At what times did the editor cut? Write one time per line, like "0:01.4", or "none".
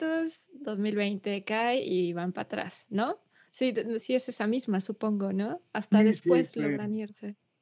0:04.0